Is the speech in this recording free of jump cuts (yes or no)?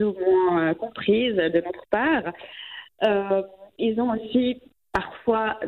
yes